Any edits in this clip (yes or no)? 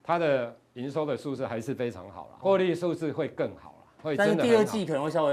yes